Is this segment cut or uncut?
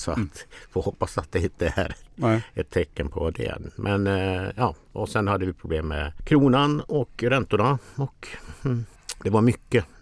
uncut